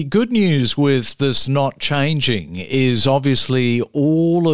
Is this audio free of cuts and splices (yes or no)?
yes